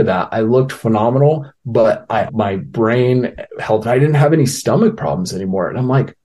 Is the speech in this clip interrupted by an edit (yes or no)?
yes